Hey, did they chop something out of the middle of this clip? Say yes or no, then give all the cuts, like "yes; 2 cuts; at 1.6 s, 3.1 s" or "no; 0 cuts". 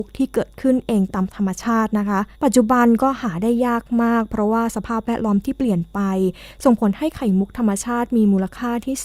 yes; 1 cut; at 2.3 s